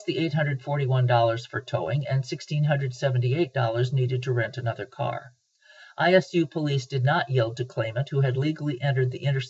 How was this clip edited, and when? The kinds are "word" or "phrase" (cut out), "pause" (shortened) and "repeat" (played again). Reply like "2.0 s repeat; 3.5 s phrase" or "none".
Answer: none